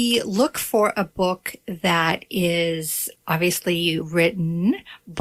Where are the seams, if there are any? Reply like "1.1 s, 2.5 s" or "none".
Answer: 3.1 s, 4.0 s